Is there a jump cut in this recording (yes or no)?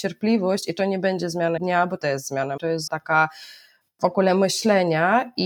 yes